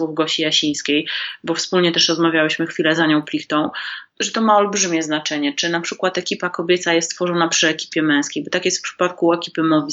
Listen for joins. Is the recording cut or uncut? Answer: uncut